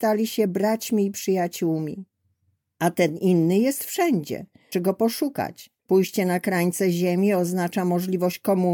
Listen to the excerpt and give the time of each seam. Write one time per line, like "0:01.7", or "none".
0:04.7
0:05.8